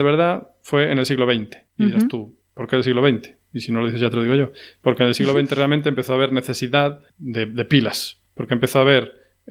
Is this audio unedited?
no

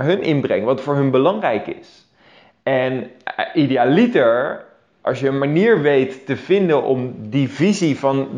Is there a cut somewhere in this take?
no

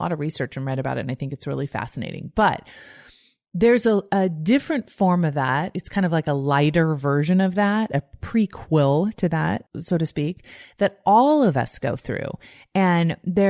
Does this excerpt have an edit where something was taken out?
no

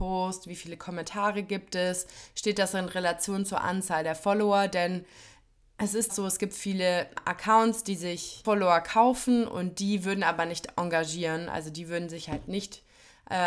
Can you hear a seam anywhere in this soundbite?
yes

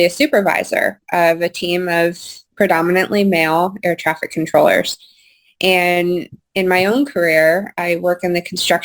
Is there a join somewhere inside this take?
no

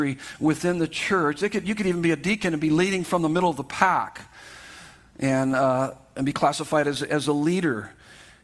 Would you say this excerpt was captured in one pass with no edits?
yes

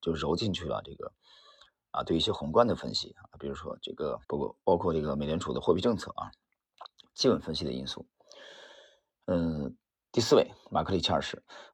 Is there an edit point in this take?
yes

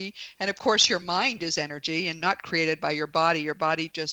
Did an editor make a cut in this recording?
no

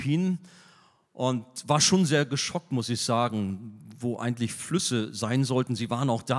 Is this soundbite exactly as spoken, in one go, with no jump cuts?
yes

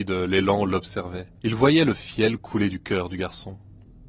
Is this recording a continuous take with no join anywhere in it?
no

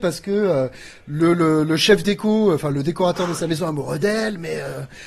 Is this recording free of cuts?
yes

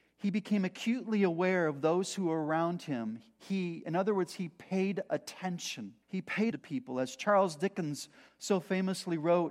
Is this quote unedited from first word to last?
no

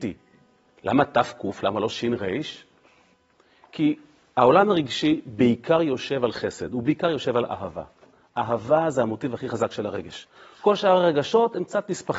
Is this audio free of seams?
yes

